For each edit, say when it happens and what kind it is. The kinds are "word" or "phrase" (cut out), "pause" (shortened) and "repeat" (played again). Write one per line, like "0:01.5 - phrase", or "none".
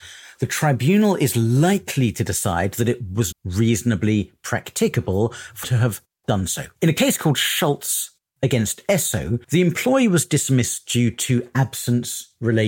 0:03.3 - word
0:05.6 - word
0:06.7 - pause
0:09.4 - pause